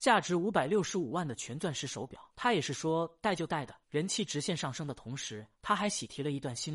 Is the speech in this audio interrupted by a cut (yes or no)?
yes